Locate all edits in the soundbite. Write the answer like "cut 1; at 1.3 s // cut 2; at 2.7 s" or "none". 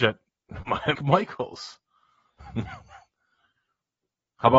cut 1; at 0.9 s